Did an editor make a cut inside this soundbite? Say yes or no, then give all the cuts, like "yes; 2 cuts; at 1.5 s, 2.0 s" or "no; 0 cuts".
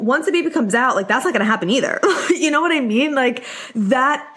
no; 0 cuts